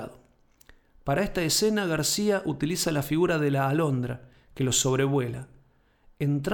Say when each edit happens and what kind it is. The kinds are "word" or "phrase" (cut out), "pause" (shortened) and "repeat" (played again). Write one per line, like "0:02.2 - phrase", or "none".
none